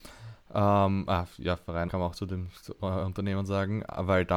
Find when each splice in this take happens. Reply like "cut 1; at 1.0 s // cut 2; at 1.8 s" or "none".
cut 1; at 1.9 s